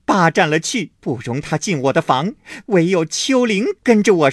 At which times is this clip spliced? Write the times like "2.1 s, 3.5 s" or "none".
0.9 s